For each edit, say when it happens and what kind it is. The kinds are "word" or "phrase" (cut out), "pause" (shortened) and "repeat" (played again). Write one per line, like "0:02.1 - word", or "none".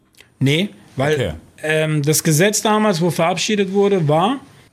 none